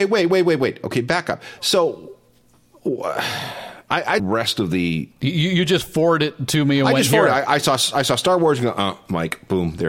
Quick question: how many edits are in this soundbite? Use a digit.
1